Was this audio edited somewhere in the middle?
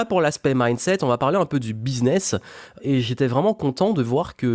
yes; 1 cut; at 2.8 s

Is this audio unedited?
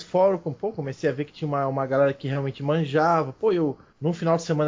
yes; 0 cuts

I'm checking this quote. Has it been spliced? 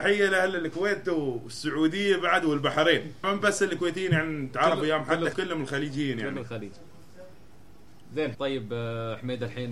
yes; 3 cuts; at 3.2 s, 5.3 s, 8.3 s

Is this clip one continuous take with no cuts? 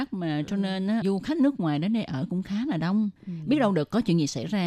no; 2 cuts; at 1.0 s, 3.2 s

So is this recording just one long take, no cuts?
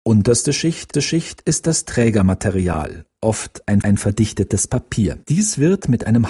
no; 3 cuts; at 0.9 s, 3.8 s, 5.2 s

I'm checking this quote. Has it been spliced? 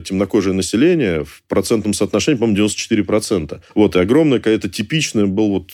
yes; 1 cut; at 3.7 s

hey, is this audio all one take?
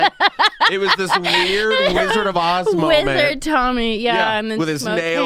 yes; 0 cuts

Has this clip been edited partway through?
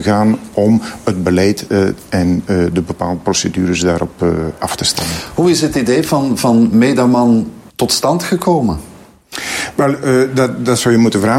yes; 1 cut; at 7.7 s

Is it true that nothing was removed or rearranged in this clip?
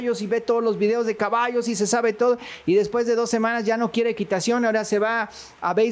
yes; 0 cuts

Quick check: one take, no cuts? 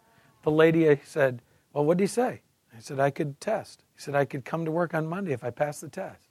no; 1 cut; at 3.9 s

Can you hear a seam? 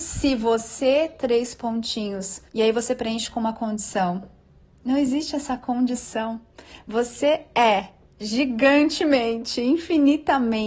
yes; 1 cut; at 2.5 s

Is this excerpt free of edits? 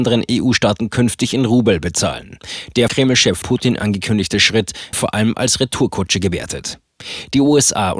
no; 3 cuts; at 2.9 s, 3.4 s, 4.9 s

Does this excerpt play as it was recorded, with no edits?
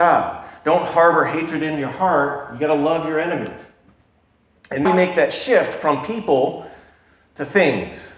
no; 1 cut; at 4.9 s

